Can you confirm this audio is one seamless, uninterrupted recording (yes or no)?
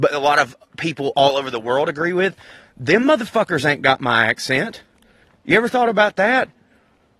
yes